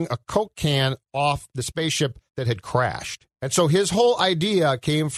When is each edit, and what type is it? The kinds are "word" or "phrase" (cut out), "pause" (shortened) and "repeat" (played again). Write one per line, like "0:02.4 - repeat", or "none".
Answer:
0:02.3 - pause
0:03.3 - pause